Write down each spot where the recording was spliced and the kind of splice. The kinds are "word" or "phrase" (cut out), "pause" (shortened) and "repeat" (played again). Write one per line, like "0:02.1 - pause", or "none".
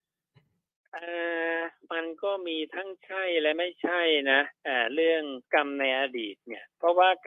0:04.6 - pause
0:05.4 - pause